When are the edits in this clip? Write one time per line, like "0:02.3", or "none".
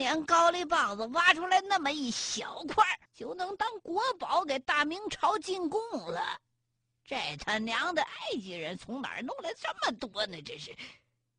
0:03.1

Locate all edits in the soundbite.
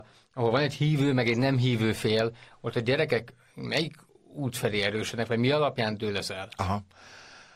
none

